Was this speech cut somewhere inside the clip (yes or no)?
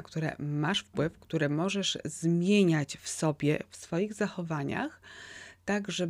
no